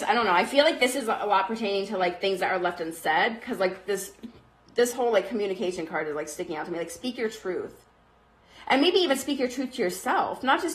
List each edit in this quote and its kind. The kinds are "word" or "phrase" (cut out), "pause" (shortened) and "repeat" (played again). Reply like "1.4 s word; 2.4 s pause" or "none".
none